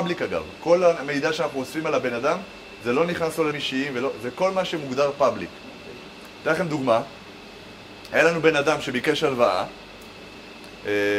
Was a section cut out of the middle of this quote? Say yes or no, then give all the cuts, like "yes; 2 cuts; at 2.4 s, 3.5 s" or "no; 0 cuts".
yes; 1 cut; at 3.5 s